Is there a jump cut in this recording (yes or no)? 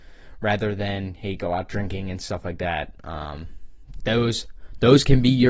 no